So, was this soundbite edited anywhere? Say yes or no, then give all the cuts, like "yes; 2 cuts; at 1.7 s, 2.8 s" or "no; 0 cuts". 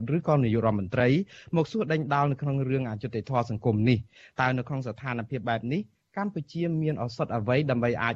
no; 0 cuts